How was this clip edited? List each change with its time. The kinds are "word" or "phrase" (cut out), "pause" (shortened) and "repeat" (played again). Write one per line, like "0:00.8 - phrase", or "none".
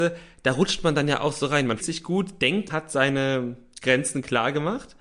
0:01.8 - word
0:02.7 - word